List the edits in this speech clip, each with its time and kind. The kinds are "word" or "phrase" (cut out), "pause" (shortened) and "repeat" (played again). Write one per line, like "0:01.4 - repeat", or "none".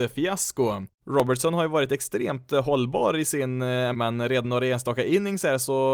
0:00.9 - pause
0:03.9 - word
0:04.4 - word